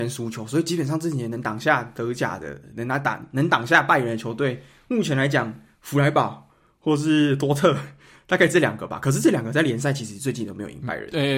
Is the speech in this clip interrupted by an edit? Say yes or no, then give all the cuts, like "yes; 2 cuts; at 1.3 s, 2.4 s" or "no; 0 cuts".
no; 0 cuts